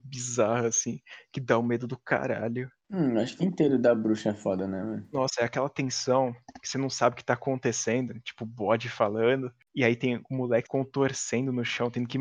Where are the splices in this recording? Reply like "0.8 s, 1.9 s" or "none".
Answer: 3.4 s, 10.6 s